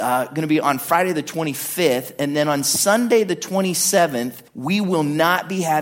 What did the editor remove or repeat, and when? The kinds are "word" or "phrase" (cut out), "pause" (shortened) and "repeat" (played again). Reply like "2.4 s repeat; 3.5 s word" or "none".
4.5 s pause